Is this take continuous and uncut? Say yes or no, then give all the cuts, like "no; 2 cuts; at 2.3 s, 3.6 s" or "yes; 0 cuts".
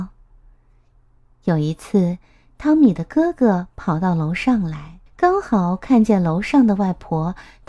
no; 1 cut; at 5.1 s